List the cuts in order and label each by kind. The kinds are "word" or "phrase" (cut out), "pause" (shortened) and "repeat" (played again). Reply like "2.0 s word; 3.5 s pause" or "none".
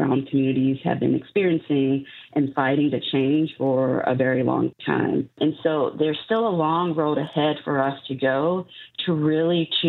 none